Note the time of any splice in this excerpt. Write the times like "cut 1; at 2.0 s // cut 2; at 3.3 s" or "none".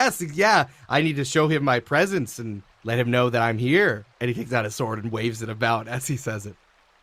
cut 1; at 2.7 s // cut 2; at 4.1 s